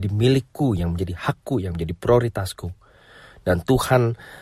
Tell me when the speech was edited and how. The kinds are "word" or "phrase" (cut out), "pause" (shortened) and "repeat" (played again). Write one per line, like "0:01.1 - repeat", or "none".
none